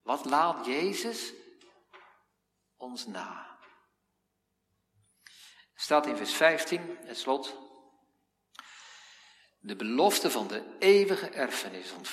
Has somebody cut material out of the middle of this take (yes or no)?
no